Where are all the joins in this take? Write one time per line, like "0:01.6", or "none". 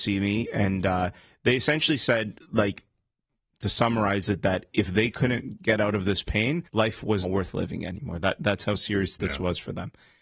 0:06.7
0:07.2